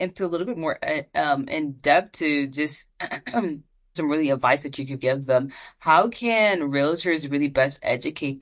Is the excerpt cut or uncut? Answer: cut